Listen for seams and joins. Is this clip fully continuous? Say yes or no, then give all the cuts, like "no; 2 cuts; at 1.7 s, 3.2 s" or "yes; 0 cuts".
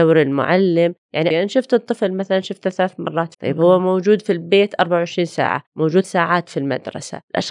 no; 3 cuts; at 1.3 s, 3.3 s, 6.0 s